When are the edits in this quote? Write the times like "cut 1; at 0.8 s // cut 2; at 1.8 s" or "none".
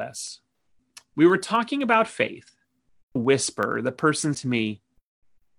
cut 1; at 3.2 s // cut 2; at 4.3 s